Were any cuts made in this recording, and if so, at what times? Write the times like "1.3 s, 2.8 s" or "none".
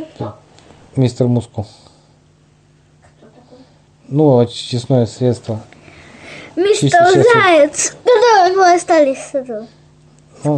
8.5 s